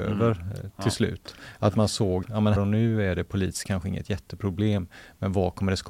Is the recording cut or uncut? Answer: cut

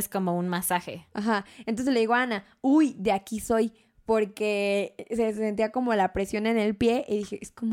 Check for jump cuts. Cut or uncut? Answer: uncut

